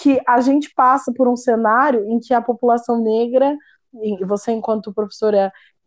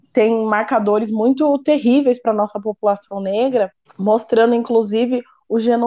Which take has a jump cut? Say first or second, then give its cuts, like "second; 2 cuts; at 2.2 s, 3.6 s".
second; 1 cut; at 3.9 s